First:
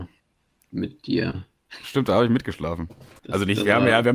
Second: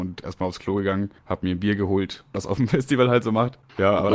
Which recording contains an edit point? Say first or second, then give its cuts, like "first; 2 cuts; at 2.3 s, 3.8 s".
second; 2 cuts; at 1.2 s, 2.3 s